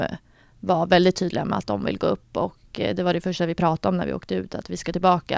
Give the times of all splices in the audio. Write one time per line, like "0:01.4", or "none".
none